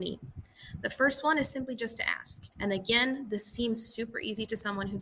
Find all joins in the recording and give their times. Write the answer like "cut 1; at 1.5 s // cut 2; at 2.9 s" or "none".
cut 1; at 2.5 s